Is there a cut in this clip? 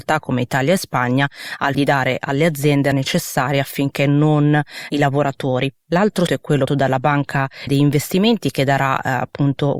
yes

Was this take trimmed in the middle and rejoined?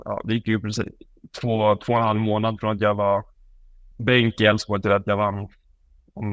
yes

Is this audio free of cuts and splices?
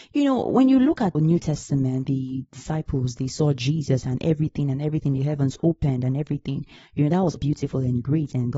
no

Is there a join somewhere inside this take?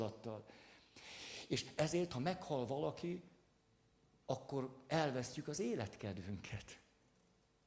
no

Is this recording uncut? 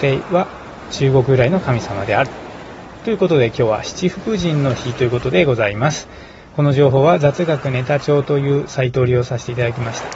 yes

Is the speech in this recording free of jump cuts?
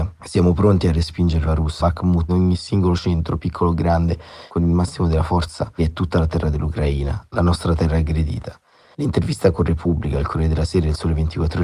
no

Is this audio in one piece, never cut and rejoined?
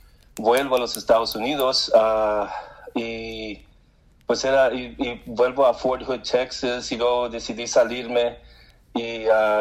yes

